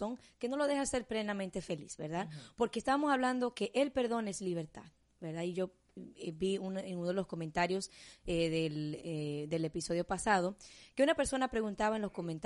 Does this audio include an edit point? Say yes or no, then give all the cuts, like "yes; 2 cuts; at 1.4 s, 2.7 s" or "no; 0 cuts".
no; 0 cuts